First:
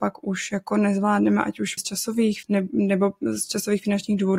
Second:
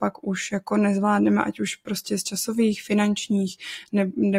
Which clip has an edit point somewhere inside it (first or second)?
first